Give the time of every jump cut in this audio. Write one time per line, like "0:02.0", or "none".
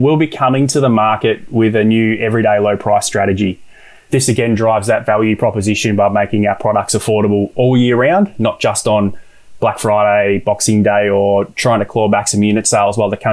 none

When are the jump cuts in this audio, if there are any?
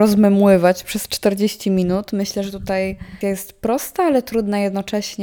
0:03.2

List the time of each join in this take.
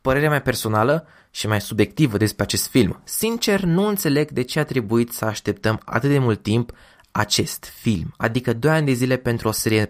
none

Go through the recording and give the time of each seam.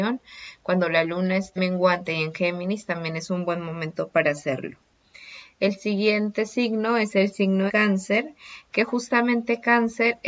0:01.6
0:07.7

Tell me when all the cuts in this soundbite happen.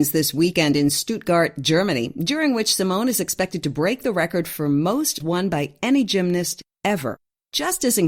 0:05.2

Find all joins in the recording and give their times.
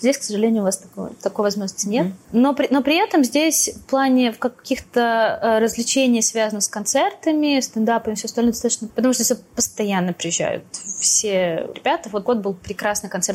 0:02.2
0:08.9
0:11.7
0:12.3

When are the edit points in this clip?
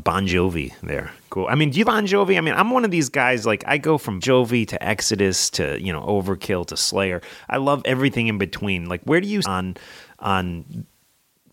0:01.8
0:04.2
0:09.4

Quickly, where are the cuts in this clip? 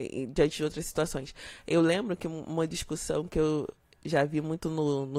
none

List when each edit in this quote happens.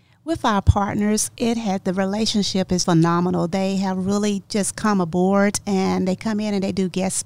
0:02.8

